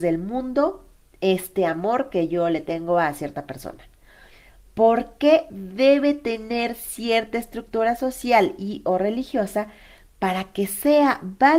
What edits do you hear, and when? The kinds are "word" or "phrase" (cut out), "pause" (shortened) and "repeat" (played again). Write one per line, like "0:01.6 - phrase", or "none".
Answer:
none

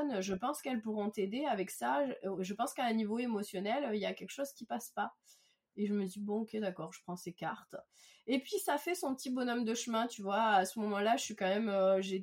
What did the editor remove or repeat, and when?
none

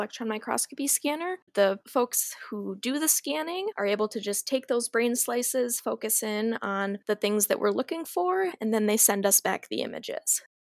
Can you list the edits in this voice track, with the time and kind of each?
0:01.5 - pause

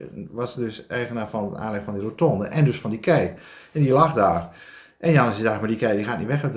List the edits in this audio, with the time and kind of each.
none

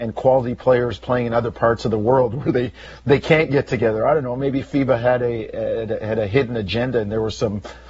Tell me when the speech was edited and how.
none

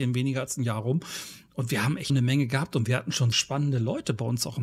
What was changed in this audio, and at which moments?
0:02.1 - word
0:03.3 - phrase

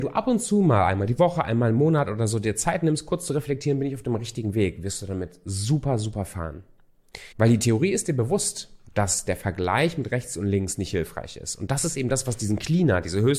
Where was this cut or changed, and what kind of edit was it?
0:07.3 - pause

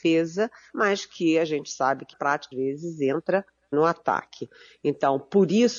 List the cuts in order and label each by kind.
0:02.1 - word
0:02.5 - word
0:03.7 - word

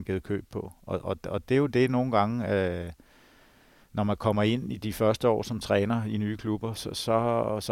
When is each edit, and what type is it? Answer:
none

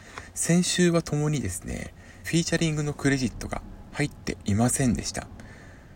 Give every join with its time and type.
0:02.2 - phrase

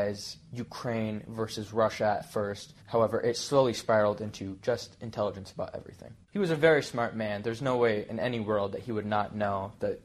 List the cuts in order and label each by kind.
0:02.8 - pause

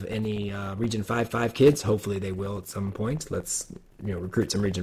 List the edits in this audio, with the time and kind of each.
0:01.3 - repeat

